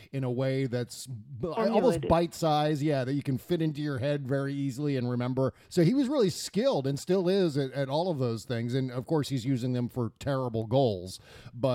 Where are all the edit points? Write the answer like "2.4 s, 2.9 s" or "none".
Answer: 5.6 s

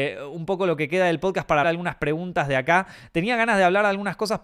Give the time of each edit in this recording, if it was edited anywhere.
1.6 s

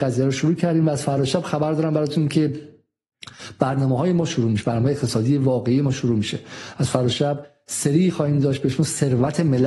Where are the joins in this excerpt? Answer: none

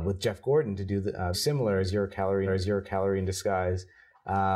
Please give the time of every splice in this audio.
1.3 s, 2.5 s

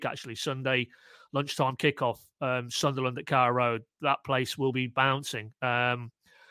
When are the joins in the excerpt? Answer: none

